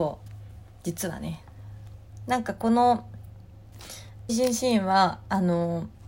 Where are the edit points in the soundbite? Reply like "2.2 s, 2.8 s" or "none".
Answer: 4.3 s